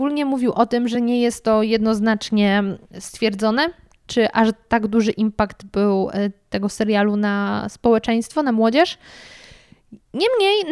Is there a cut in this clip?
no; 0 cuts

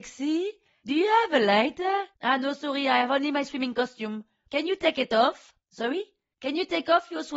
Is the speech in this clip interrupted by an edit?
yes; 1 cut; at 2.1 s

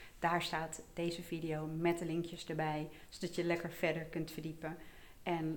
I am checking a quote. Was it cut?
no; 0 cuts

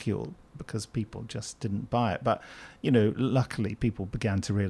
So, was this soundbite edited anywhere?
no; 0 cuts

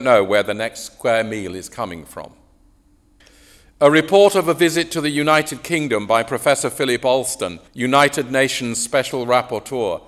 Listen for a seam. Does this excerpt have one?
yes; 2 cuts; at 3.2 s, 7.7 s

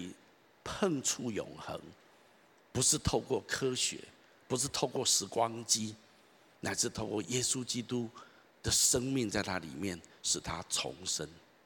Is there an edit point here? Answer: no; 0 cuts

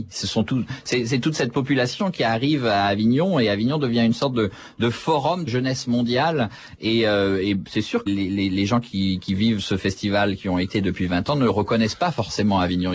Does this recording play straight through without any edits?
no; 2 cuts; at 5.5 s, 8.1 s

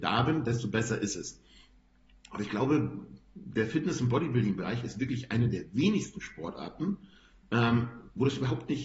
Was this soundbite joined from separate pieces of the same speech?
no; 0 cuts

